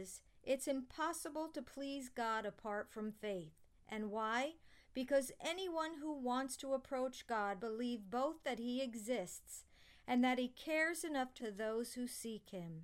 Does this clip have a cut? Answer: yes; 2 cuts; at 7.6 s, 11.4 s

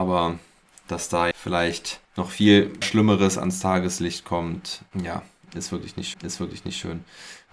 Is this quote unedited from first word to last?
no; 5 cuts; at 1.3 s, 2.0 s, 2.8 s, 4.9 s, 6.1 s

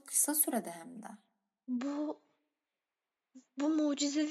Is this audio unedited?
yes; 0 cuts

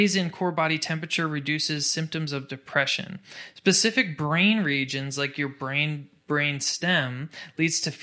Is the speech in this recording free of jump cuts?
yes; 0 cuts

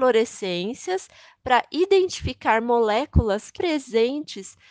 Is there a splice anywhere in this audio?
yes; 1 cut; at 3.5 s

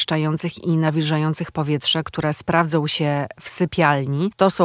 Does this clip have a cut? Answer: no; 0 cuts

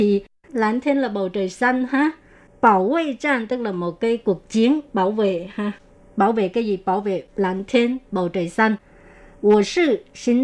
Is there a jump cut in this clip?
no; 0 cuts

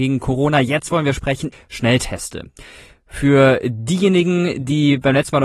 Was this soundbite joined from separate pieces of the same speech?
yes; 1 cut; at 1.5 s

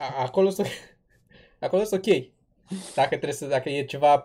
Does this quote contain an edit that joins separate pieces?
no; 0 cuts

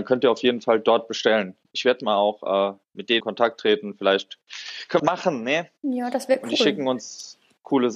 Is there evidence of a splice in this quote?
yes; 2 cuts; at 3.2 s, 5.0 s

